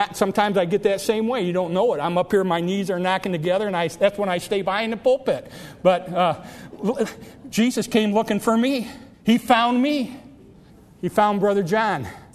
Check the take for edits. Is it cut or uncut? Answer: cut